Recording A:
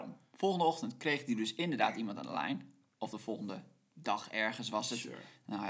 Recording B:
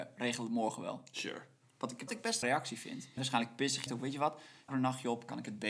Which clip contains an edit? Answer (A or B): B